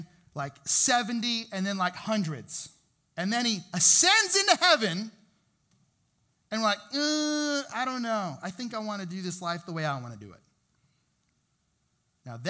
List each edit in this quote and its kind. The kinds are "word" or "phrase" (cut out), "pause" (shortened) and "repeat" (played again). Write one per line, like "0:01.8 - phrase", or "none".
none